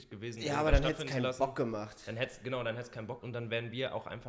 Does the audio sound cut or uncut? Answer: cut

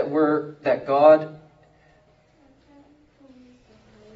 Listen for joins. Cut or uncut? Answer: uncut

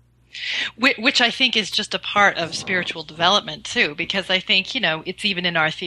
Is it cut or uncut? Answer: uncut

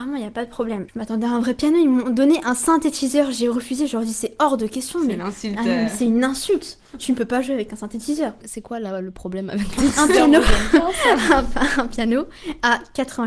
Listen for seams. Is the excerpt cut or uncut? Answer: cut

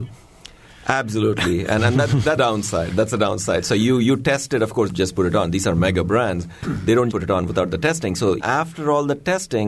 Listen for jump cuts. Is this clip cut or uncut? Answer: cut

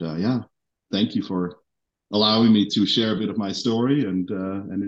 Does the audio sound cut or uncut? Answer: uncut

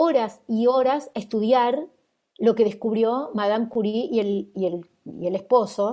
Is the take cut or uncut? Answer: uncut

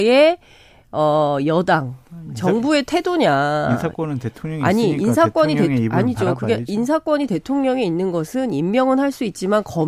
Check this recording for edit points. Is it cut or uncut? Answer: uncut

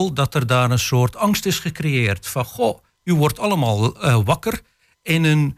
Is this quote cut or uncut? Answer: uncut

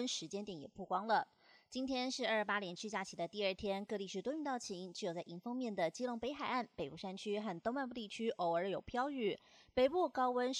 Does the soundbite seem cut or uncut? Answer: uncut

